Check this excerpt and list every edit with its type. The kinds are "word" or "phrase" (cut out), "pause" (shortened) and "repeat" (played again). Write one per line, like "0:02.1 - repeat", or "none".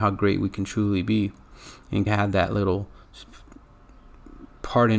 0:02.1 - word